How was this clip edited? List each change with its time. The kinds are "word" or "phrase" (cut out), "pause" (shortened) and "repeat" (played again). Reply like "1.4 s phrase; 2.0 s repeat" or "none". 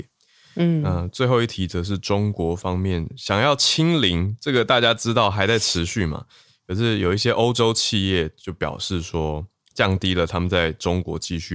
9.7 s word